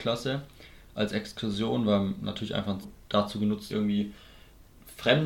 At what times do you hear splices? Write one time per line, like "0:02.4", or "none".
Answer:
0:02.8
0:03.7

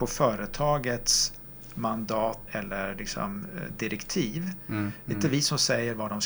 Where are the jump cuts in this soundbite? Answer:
0:02.5

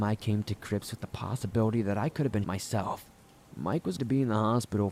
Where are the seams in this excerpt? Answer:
0:02.4
0:04.0

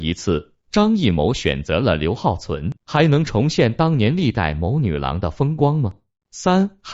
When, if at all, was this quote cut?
0:02.8

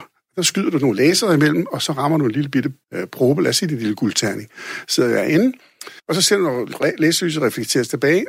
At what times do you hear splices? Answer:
0:02.8
0:06.0

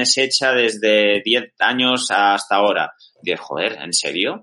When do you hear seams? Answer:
none

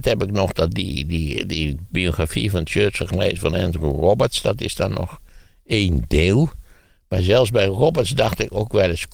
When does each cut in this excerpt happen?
none

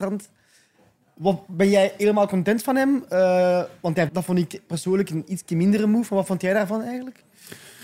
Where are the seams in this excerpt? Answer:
0:04.1

